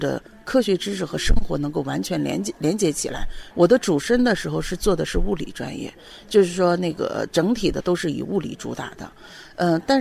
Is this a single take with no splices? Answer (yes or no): yes